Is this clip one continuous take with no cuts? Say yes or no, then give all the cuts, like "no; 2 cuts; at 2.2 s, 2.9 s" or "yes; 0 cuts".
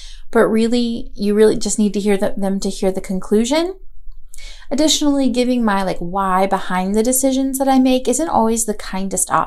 yes; 0 cuts